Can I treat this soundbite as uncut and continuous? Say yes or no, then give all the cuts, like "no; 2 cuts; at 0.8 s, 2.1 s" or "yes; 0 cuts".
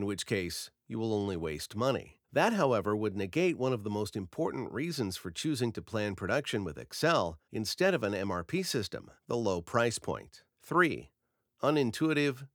no; 4 cuts; at 2.2 s, 7.4 s, 9.2 s, 10.5 s